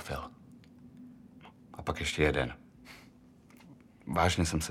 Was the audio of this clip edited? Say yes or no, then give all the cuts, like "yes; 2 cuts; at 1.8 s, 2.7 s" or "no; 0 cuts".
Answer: no; 0 cuts